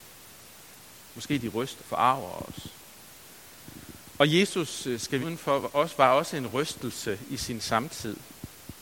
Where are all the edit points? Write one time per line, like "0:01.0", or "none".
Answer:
0:01.8
0:05.2